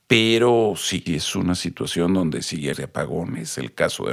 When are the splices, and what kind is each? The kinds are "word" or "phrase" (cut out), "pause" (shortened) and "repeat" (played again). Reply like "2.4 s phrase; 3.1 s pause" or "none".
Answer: 1.1 s word; 2.7 s phrase